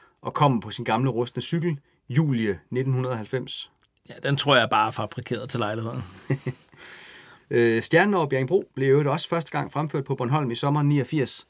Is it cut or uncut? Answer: uncut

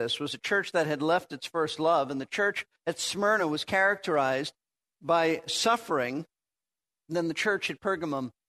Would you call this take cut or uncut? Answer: uncut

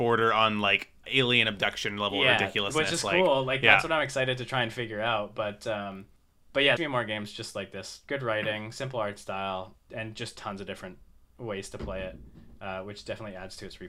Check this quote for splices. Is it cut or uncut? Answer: cut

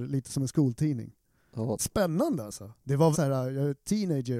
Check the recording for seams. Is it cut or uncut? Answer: cut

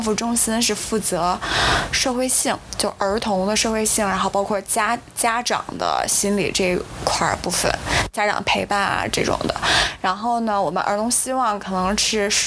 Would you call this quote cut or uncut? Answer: uncut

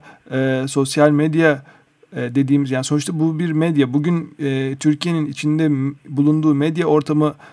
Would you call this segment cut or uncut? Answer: uncut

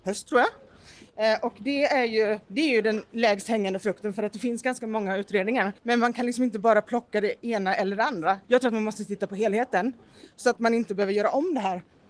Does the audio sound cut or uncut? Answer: cut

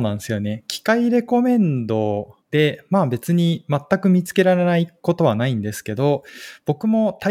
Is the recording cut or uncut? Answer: cut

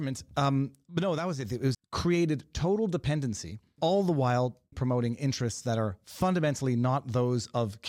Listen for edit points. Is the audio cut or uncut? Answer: cut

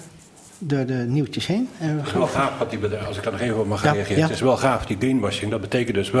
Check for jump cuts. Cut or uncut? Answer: uncut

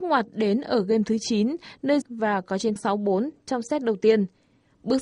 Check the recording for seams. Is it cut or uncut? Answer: cut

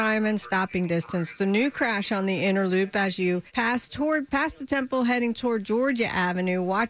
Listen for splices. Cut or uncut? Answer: cut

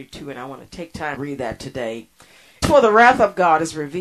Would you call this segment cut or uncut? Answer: cut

